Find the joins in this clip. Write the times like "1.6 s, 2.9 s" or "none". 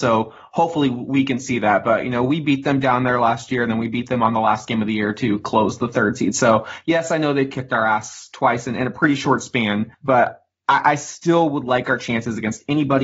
9.9 s